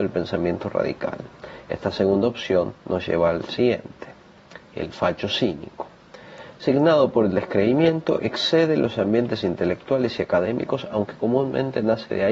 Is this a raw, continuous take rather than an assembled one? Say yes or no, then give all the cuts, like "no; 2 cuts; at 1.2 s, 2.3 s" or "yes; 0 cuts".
yes; 0 cuts